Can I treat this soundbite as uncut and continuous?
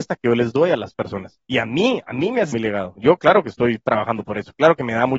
no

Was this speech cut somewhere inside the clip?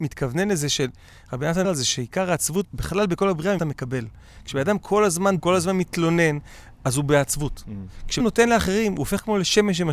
yes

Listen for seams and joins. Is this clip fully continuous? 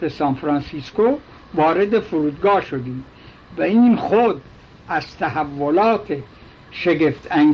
yes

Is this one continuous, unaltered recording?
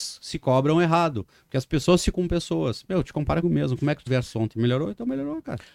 no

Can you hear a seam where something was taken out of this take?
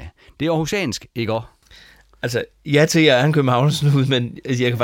no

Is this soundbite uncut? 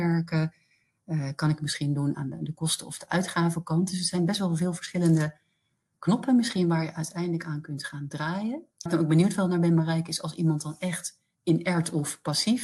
no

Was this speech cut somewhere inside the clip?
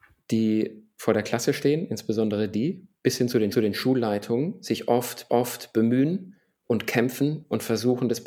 yes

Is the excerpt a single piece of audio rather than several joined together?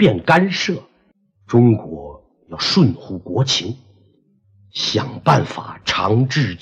yes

